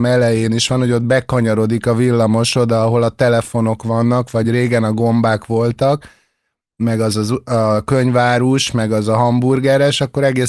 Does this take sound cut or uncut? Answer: uncut